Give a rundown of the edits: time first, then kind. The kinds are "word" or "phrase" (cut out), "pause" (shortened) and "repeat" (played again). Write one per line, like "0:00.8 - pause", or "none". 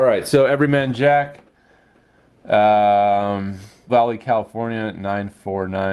0:03.9 - word